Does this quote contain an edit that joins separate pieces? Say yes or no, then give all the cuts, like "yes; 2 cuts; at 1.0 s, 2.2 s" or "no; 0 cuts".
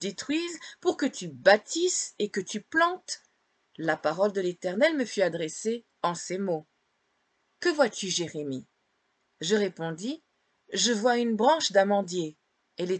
no; 0 cuts